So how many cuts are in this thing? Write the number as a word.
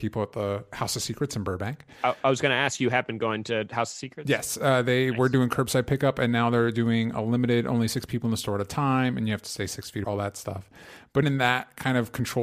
two